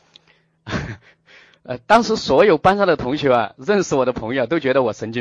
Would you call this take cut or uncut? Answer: uncut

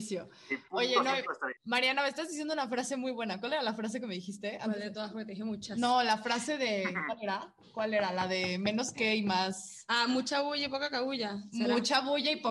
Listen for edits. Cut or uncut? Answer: cut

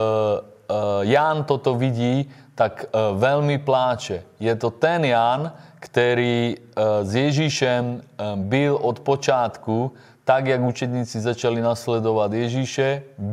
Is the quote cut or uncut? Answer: uncut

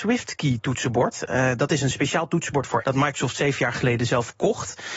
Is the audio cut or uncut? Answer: cut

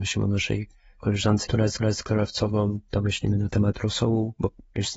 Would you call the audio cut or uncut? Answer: cut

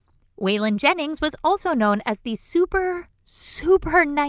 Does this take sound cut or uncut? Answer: uncut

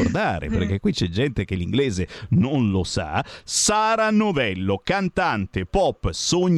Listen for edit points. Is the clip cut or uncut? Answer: uncut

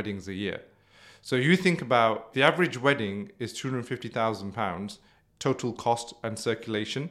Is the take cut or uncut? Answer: cut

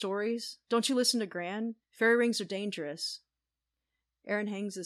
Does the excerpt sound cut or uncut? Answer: cut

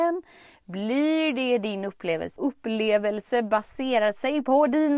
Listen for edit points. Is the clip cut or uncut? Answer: cut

